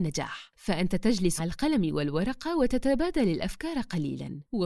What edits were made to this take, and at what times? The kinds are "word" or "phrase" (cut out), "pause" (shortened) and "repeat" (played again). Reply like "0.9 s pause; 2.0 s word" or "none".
1.4 s word